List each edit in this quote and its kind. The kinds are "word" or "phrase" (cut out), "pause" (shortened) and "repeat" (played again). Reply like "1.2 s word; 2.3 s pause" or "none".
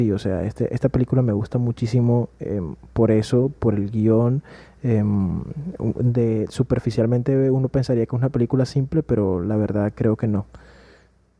3.6 s word